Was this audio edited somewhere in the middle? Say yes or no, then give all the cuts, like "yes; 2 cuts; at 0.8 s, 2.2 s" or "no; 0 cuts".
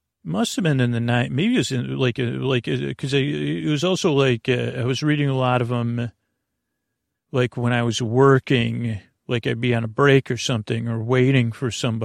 no; 0 cuts